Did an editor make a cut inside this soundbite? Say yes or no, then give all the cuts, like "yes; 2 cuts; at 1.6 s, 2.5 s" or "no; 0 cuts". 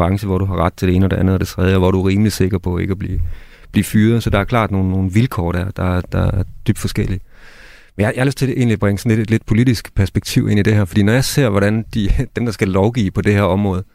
no; 0 cuts